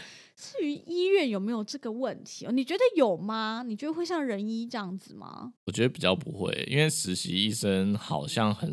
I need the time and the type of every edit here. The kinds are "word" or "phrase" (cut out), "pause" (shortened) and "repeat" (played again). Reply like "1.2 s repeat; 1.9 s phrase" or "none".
5.6 s pause